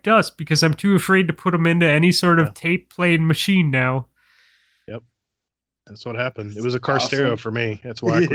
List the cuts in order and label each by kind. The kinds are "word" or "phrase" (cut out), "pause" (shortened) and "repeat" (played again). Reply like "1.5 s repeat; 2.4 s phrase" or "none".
none